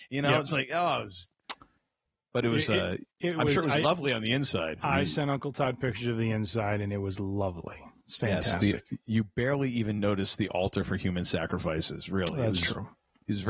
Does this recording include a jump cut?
no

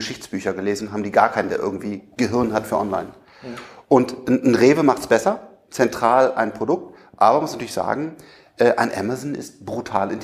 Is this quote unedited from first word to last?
yes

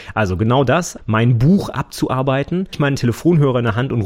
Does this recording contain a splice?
yes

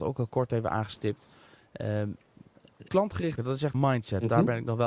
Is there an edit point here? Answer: yes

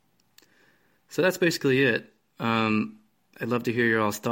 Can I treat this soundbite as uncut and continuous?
yes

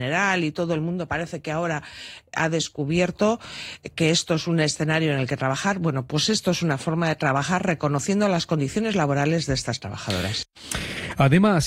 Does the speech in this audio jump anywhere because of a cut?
no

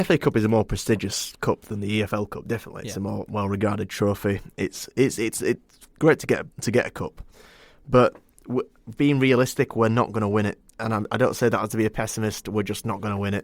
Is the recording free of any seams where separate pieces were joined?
no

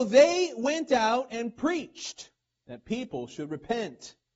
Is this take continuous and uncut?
yes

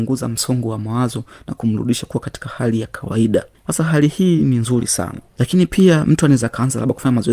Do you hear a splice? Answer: no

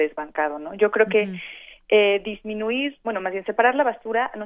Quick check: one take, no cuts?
no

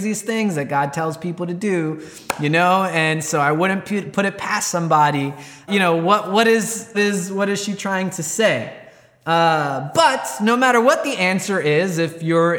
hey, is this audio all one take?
no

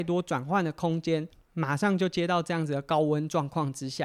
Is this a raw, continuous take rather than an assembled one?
yes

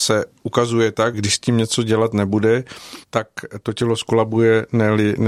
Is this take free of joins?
no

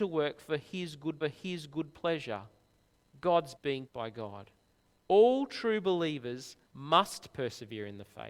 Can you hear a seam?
yes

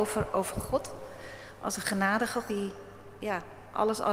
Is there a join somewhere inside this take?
yes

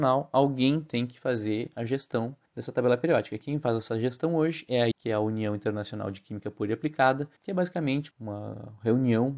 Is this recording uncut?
no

